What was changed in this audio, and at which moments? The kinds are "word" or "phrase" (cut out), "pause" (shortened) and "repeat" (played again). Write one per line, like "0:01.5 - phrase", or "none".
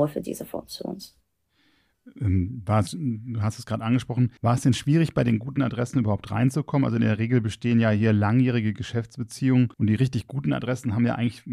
0:04.4 - pause
0:09.7 - pause